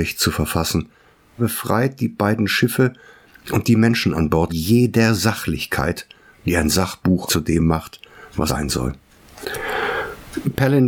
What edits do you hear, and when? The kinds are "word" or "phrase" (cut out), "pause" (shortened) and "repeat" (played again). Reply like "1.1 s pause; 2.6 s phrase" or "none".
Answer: 1.4 s word; 4.5 s word; 7.3 s word; 8.5 s word